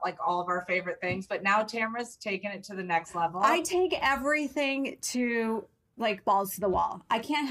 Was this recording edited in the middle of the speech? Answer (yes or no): no